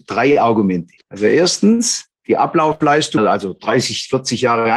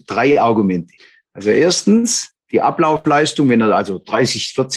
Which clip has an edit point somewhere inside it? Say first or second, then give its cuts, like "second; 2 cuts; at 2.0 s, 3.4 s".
first; 2 cuts; at 1.0 s, 3.2 s